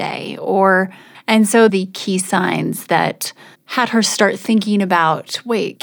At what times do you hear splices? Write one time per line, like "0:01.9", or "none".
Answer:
0:01.1
0:01.7
0:03.5